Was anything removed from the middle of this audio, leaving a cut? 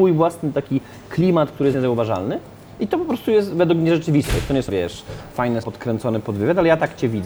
yes; 3 cuts; at 1.7 s, 4.7 s, 5.6 s

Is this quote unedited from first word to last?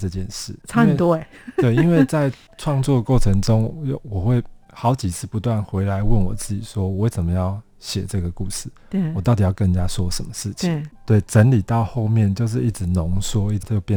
yes; 0 cuts

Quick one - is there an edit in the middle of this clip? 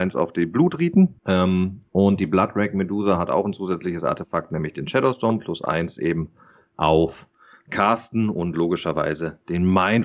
yes; 1 cut; at 1.2 s

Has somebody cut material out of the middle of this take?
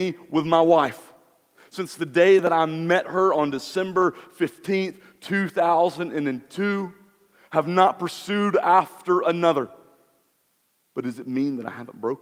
no; 0 cuts

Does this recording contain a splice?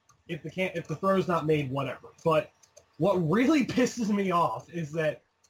no; 0 cuts

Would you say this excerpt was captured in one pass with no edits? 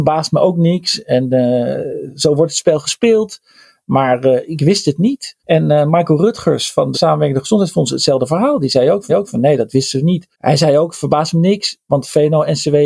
no; 4 cuts; at 5.4 s, 6.9 s, 9.1 s, 10.3 s

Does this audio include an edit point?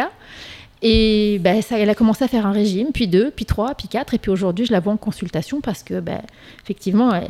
no; 0 cuts

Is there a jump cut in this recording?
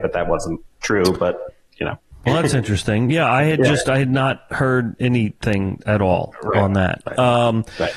no; 0 cuts

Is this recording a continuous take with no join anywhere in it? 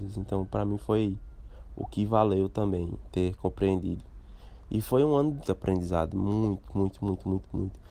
no; 1 cut; at 5.5 s

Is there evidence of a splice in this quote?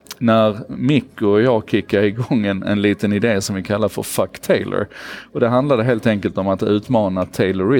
no; 0 cuts

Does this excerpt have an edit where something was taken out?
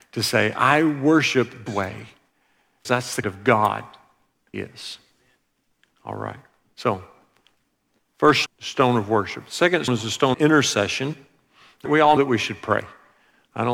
yes; 9 cuts; at 1.7 s, 2.8 s, 3.2 s, 4.5 s, 8.5 s, 9.9 s, 10.3 s, 11.9 s, 12.2 s

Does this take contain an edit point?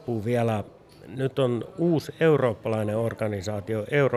no; 0 cuts

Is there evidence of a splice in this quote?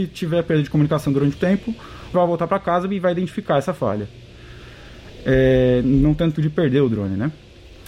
yes; 3 cuts; at 1.4 s, 2.1 s, 6.3 s

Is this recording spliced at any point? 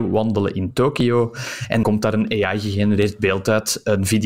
yes; 1 cut; at 1.8 s

